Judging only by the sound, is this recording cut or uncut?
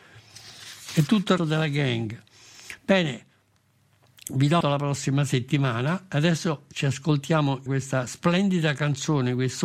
cut